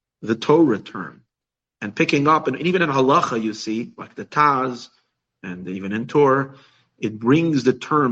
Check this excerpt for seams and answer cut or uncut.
uncut